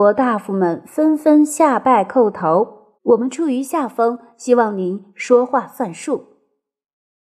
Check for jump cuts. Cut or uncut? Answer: cut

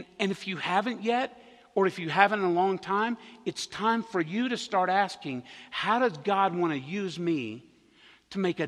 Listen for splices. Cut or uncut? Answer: uncut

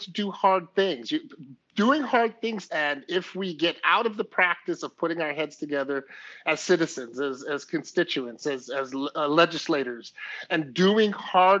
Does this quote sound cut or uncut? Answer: cut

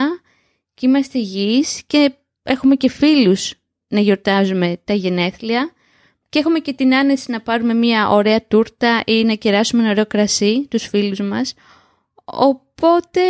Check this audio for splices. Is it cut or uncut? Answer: uncut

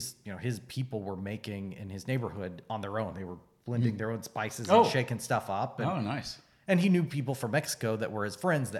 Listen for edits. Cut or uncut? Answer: uncut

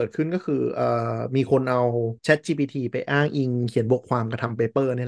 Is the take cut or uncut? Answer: uncut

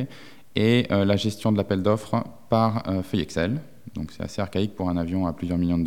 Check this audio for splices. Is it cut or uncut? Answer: uncut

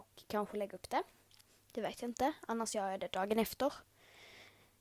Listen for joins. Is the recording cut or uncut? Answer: uncut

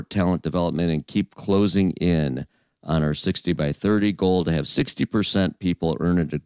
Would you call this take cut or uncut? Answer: uncut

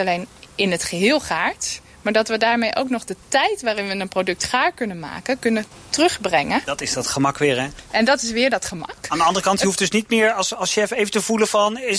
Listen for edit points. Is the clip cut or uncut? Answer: uncut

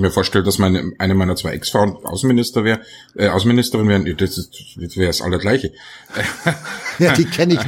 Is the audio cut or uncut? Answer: uncut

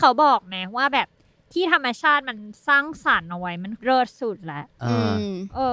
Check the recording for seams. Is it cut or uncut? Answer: uncut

